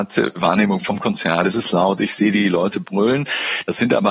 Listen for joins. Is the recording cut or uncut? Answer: uncut